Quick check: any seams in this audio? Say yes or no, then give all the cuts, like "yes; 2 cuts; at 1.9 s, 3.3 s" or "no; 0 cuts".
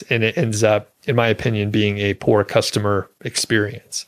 no; 0 cuts